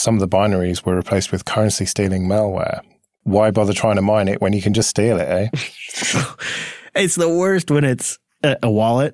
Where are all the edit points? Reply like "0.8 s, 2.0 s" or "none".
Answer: none

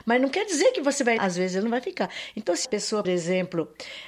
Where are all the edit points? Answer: 1.2 s, 2.6 s, 3.0 s

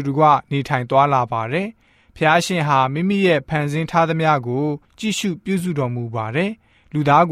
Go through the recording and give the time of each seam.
none

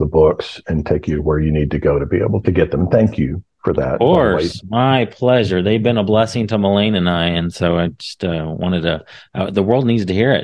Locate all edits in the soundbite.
2.4 s

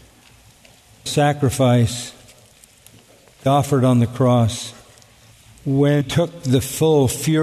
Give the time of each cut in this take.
1.1 s, 3.5 s, 6.0 s

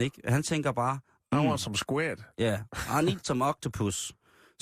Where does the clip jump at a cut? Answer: none

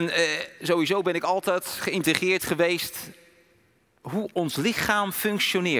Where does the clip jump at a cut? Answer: none

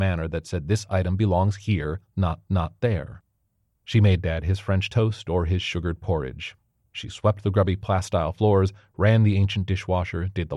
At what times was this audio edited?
2.5 s

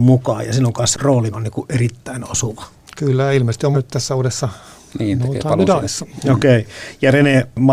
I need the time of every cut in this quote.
1.3 s, 3.7 s

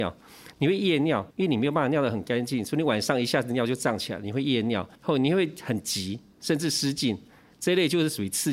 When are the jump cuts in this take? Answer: 1.3 s, 5.0 s

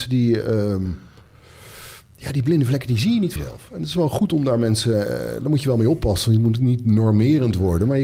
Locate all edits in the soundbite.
3.4 s

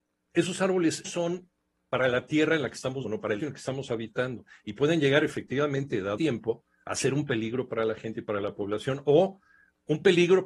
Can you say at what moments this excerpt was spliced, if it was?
1.0 s, 3.0 s, 3.4 s, 6.2 s

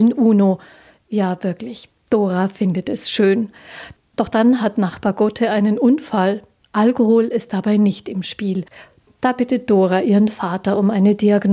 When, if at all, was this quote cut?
none

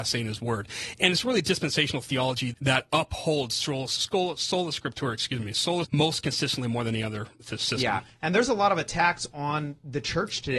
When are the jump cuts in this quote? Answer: 2.5 s, 5.8 s

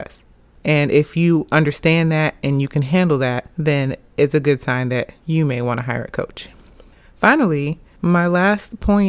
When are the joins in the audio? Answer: 3.5 s

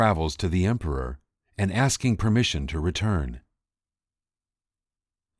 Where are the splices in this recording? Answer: none

